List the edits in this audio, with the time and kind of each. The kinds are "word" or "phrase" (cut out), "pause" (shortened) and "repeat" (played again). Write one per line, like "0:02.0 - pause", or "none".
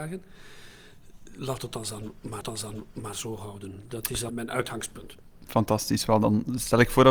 0:02.4 - repeat
0:04.3 - word